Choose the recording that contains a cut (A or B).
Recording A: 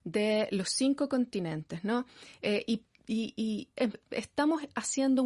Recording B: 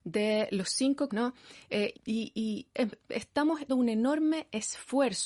B